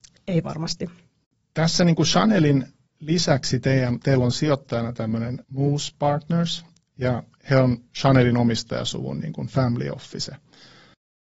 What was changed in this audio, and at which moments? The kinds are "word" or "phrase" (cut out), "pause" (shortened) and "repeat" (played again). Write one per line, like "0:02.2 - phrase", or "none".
0:05.4 - pause